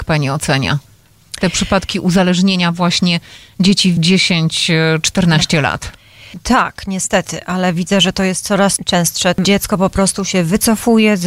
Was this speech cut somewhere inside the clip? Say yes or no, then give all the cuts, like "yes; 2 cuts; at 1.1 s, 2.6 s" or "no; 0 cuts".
yes; 1 cut; at 4.0 s